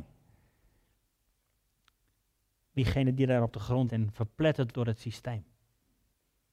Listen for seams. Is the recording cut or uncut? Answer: cut